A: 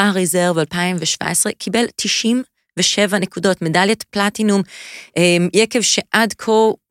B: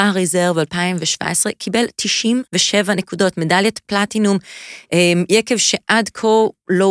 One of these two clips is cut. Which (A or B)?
B